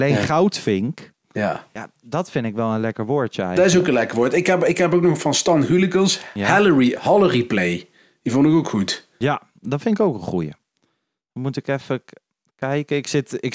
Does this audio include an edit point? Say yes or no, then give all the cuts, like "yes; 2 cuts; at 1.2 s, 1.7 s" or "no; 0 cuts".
no; 0 cuts